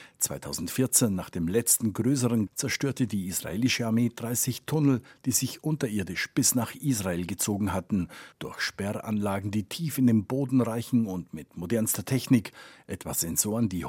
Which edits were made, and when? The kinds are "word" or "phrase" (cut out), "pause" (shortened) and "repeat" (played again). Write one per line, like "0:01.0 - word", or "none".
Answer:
0:02.5 - word
0:08.3 - pause